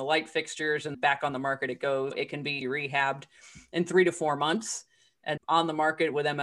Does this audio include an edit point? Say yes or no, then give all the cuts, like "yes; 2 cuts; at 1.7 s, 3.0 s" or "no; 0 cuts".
yes; 4 cuts; at 0.9 s, 2.1 s, 2.6 s, 5.4 s